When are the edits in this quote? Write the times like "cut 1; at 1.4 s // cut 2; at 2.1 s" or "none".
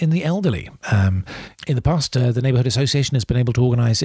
none